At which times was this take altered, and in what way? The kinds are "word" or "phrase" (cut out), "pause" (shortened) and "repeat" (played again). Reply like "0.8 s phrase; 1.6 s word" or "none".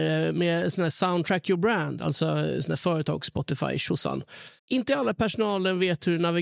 4.6 s pause